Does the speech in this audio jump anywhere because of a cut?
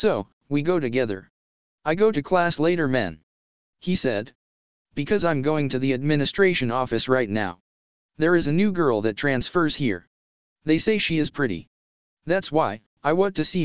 no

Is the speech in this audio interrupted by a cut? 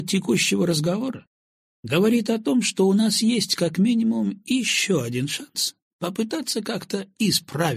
no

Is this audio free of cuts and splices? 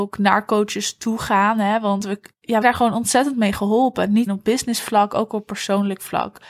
no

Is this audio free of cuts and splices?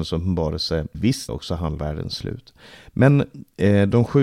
no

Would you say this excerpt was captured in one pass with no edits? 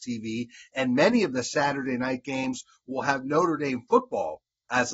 yes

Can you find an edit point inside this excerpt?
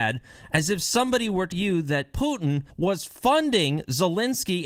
yes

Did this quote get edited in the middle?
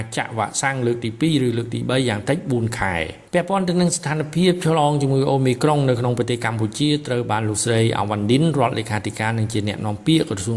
yes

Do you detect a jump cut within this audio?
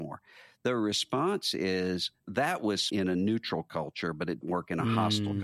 yes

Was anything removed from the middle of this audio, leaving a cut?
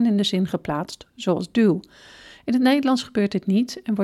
no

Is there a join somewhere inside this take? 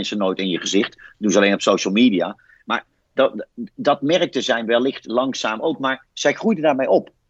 no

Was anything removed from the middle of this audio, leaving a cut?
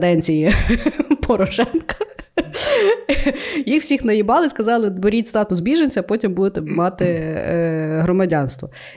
no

